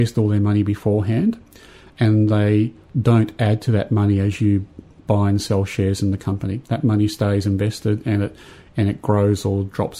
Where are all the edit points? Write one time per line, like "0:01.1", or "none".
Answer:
none